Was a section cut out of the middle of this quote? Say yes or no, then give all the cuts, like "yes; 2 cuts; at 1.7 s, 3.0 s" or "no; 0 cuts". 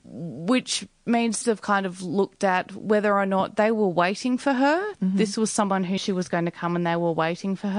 yes; 2 cuts; at 1.4 s, 6.0 s